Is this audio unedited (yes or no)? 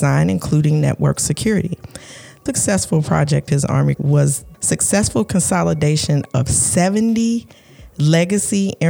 no